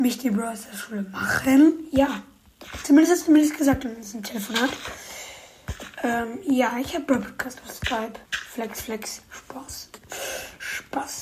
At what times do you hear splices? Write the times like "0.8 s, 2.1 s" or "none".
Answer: 8.2 s